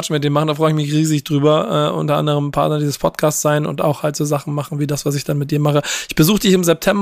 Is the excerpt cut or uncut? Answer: uncut